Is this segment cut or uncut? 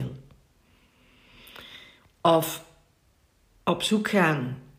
uncut